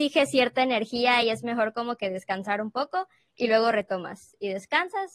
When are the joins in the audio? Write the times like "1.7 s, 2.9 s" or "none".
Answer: none